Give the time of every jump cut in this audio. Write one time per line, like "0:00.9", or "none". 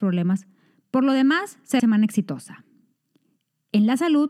0:01.8